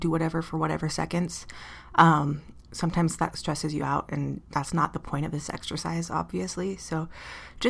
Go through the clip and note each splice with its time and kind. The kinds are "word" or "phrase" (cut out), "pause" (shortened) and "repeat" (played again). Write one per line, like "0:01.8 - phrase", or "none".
none

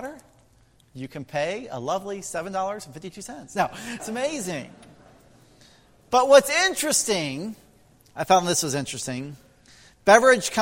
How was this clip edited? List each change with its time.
0:04.0 - word

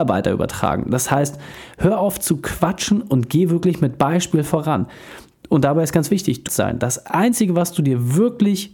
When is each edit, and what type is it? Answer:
0:06.5 - phrase

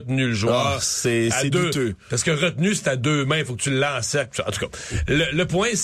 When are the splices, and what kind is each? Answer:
none

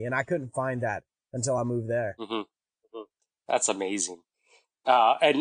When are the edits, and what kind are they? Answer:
none

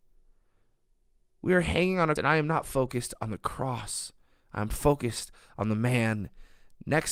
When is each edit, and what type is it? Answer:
0:02.2 - word

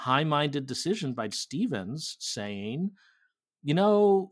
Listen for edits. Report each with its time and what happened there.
0:01.3 - word

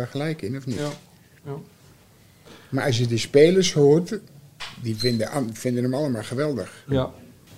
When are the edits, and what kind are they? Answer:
none

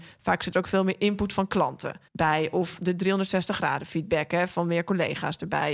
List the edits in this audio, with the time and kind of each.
0:02.1 - pause

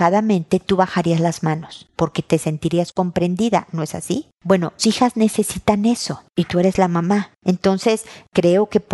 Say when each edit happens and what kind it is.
0:04.8 - word

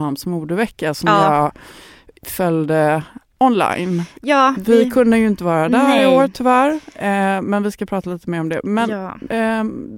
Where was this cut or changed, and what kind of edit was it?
none

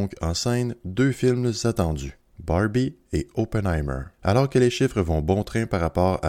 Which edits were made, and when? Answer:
0:02.3 - pause
0:04.1 - pause

